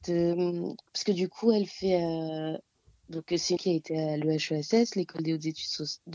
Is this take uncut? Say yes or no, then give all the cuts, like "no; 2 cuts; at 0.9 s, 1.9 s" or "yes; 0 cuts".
no; 1 cut; at 3.6 s